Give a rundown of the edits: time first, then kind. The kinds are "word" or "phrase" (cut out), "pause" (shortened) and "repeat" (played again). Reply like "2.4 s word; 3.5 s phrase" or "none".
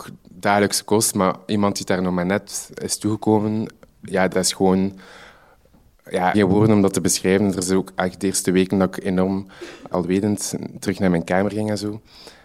4.3 s word; 6.3 s phrase; 9.9 s word